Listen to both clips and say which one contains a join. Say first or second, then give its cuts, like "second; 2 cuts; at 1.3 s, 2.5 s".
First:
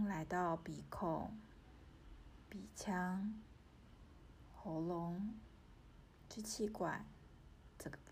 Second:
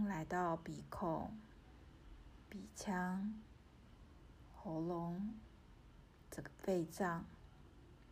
second; 1 cut; at 6.2 s